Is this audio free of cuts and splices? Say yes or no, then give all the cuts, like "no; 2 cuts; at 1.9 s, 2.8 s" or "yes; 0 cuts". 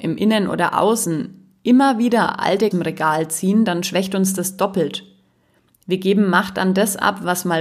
no; 1 cut; at 2.7 s